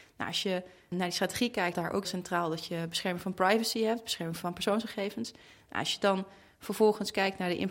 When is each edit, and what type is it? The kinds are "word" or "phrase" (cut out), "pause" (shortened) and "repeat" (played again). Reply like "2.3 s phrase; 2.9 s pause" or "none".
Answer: 0.9 s word; 1.7 s word; 2.0 s word